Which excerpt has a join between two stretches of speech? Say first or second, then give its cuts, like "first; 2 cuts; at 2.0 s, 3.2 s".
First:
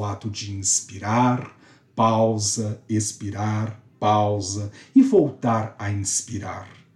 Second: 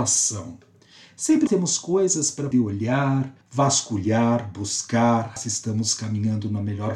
second; 4 cuts; at 1.5 s, 2.5 s, 3.4 s, 5.4 s